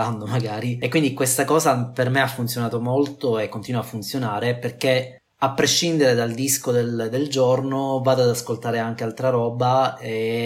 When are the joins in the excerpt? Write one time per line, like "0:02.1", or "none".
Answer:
none